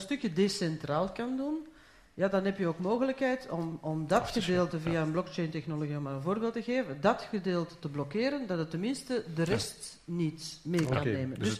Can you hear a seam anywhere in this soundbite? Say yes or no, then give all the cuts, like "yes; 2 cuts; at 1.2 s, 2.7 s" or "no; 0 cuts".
no; 0 cuts